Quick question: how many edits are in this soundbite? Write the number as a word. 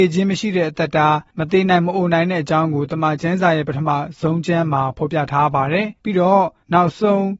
one